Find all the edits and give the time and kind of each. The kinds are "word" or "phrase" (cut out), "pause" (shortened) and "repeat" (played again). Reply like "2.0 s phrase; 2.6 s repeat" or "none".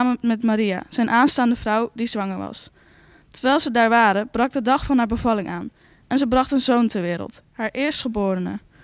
none